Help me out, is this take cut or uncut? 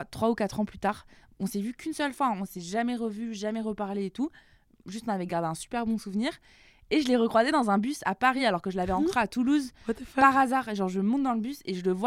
uncut